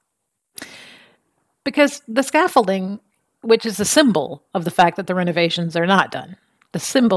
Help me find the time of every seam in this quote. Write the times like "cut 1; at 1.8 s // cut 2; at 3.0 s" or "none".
none